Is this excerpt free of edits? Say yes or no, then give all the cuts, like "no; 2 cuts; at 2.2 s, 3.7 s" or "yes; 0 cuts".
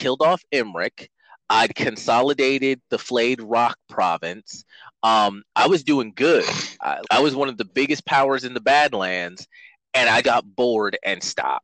no; 2 cuts; at 7.0 s, 10.2 s